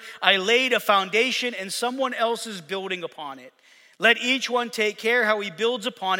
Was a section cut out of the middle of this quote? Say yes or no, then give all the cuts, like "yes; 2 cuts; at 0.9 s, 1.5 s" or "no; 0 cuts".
no; 0 cuts